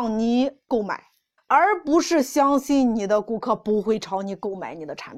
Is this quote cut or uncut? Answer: cut